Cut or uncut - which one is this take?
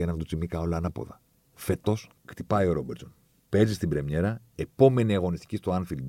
uncut